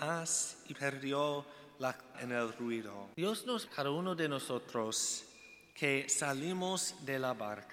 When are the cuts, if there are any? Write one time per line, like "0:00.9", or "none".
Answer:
0:02.1
0:03.1
0:03.7